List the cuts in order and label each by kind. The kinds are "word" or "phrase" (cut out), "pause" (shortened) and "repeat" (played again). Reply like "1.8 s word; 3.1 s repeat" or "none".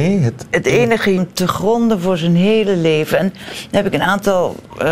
1.2 s word